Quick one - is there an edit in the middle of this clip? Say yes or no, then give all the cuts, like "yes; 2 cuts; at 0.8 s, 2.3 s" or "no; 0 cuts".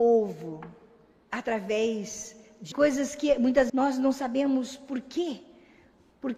yes; 2 cuts; at 2.7 s, 3.7 s